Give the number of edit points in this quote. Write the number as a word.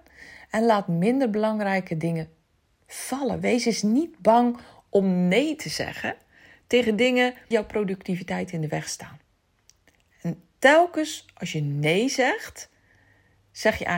one